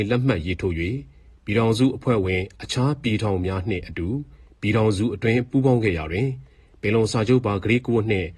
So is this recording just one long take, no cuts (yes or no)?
yes